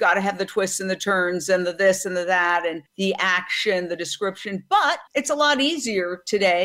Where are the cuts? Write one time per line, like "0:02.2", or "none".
0:02.8
0:05.1

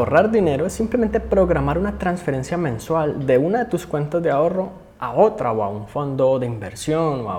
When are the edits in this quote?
none

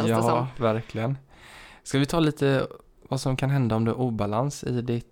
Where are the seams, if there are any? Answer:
none

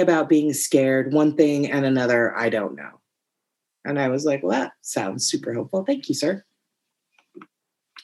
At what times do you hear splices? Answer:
none

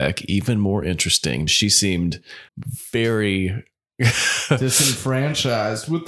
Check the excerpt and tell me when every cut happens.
0:01.5
0:02.5

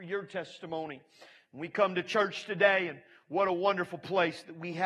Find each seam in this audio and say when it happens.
none

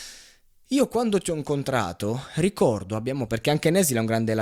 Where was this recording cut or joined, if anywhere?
0:03.3

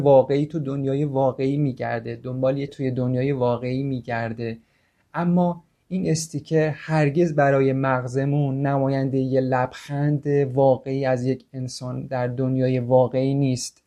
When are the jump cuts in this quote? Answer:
0:02.7

